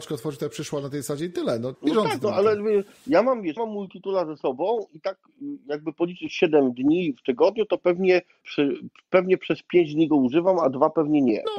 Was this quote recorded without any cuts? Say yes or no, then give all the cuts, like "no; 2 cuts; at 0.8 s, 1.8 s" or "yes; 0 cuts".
no; 3 cuts; at 1.7 s, 3.6 s, 8.4 s